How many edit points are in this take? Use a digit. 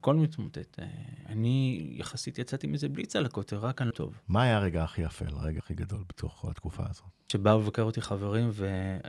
2